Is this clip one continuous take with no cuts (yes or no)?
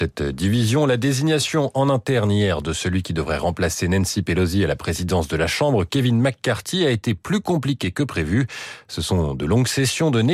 yes